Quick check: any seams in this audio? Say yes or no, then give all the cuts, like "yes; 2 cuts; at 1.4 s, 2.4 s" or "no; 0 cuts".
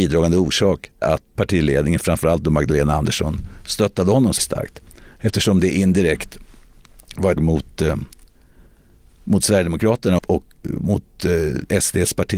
yes; 6 cuts; at 1.0 s, 1.3 s, 4.4 s, 7.4 s, 10.2 s, 10.6 s